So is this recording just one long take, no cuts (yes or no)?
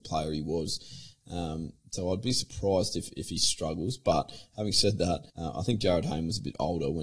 no